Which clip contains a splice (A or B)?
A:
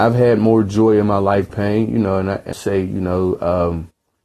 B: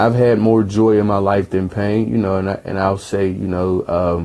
A